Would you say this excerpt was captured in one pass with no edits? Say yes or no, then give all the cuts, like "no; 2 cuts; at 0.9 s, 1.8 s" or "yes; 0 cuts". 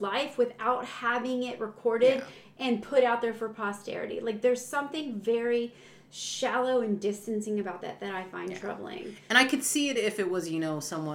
yes; 0 cuts